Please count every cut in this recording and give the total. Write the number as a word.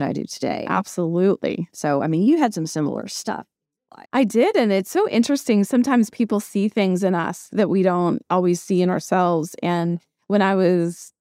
one